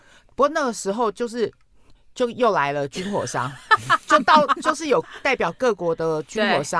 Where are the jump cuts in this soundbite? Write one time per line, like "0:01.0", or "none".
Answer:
none